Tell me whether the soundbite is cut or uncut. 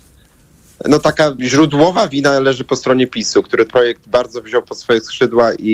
cut